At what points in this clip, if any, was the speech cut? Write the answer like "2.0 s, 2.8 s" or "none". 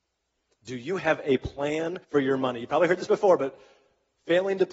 2.0 s